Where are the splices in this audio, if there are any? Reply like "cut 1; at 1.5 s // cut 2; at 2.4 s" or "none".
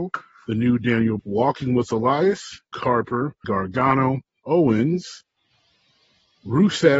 cut 1; at 1.2 s // cut 2; at 2.7 s // cut 3; at 3.4 s // cut 4; at 4.4 s